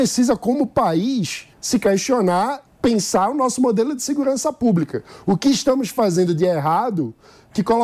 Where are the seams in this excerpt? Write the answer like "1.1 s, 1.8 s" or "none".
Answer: 1.5 s, 2.7 s